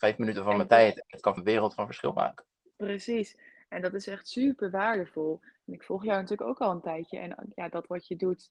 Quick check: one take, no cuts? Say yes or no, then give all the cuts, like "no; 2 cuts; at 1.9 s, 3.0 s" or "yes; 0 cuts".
no; 1 cut; at 1.4 s